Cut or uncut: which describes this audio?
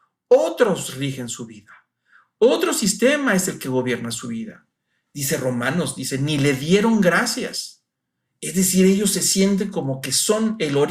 uncut